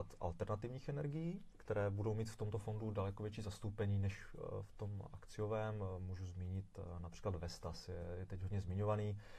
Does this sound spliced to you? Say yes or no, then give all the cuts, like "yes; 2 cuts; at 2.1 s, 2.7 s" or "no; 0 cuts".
no; 0 cuts